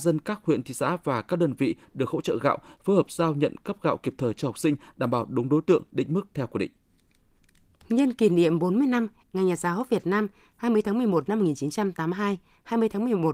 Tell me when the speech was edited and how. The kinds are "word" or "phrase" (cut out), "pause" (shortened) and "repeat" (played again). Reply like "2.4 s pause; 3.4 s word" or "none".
none